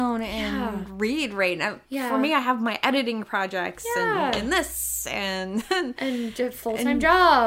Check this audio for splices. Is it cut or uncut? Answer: cut